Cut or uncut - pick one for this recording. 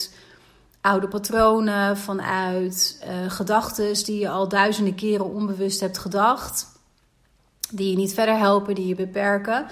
uncut